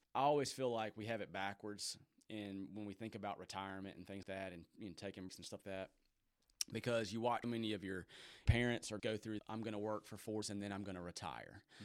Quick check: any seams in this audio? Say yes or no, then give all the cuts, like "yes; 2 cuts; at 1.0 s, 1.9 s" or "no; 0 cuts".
yes; 8 cuts; at 4.2 s, 5.3 s, 5.6 s, 7.4 s, 8.5 s, 9.0 s, 9.4 s, 10.4 s